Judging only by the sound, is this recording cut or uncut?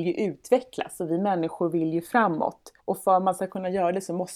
cut